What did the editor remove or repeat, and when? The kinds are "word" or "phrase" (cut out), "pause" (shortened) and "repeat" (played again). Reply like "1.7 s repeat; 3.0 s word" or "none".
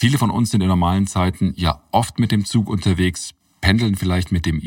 none